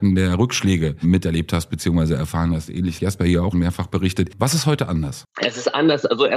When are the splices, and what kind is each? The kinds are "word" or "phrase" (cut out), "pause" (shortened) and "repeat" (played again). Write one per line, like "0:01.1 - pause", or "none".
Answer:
0:03.0 - word
0:03.5 - word

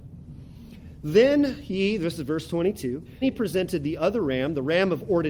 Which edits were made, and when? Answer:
0:03.2 - word

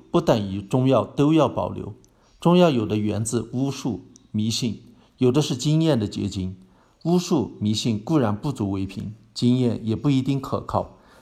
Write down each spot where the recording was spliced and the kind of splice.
none

